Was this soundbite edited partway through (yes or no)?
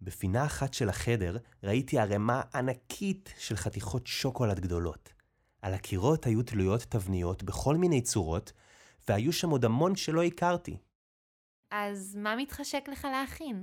yes